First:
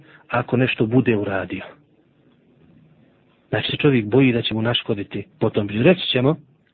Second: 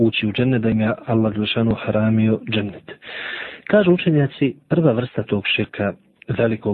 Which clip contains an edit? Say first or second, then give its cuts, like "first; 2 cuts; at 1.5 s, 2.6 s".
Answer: first; 2 cuts; at 3.7 s, 5.3 s